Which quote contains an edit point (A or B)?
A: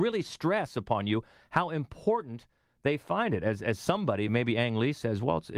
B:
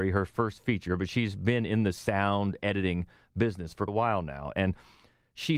B